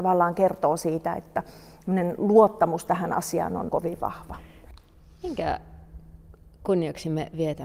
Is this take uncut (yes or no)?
no